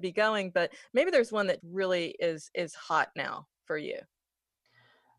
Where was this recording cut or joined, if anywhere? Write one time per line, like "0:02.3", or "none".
0:01.6